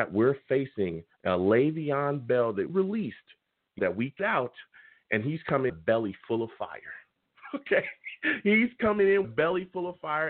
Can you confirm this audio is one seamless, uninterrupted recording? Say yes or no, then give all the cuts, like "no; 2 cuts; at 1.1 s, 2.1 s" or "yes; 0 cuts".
no; 6 cuts; at 1.1 s, 2.7 s, 3.8 s, 4.2 s, 5.7 s, 9.2 s